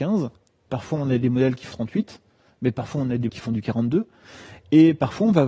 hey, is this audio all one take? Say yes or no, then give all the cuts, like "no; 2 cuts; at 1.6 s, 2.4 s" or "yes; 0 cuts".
no; 2 cuts; at 1.7 s, 3.3 s